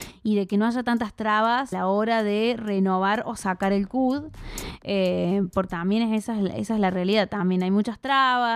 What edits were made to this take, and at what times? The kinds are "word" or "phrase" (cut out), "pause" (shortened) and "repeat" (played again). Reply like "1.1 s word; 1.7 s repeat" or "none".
1.7 s word; 5.7 s word